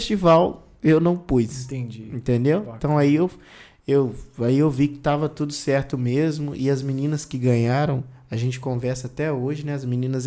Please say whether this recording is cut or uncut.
uncut